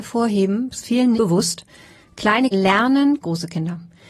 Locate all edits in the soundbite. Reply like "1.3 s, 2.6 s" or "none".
1.1 s, 2.5 s, 3.2 s